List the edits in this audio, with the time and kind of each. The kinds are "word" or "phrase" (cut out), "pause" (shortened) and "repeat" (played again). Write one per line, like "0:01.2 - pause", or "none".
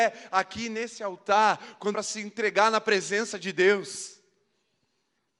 0:01.9 - phrase